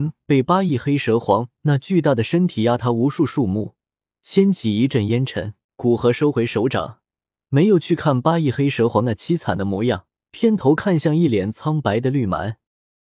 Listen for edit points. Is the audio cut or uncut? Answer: cut